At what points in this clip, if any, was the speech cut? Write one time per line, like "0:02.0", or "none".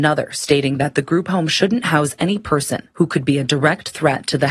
0:02.9